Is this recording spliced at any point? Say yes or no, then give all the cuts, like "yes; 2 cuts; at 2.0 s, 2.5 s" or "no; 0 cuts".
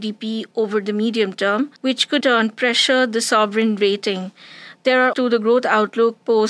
yes; 3 cuts; at 1.8 s, 2.2 s, 5.1 s